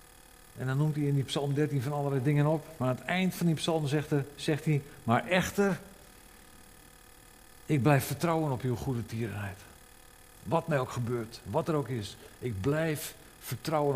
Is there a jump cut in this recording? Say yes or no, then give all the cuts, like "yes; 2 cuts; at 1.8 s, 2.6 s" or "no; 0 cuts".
no; 0 cuts